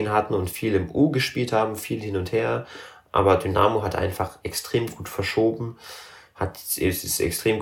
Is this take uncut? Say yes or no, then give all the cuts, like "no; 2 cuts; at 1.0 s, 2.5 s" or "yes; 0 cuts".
yes; 0 cuts